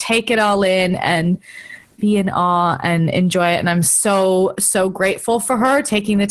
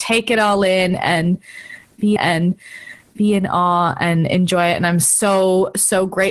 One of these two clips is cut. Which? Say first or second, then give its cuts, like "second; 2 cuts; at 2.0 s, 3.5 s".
second; 1 cut; at 2.2 s